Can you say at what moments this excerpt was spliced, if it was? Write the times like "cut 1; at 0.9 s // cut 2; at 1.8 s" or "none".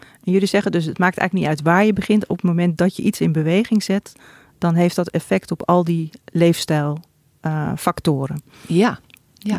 none